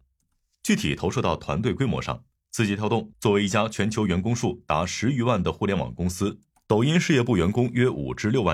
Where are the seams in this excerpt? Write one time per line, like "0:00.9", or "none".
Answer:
none